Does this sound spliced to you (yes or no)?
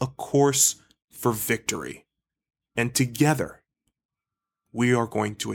no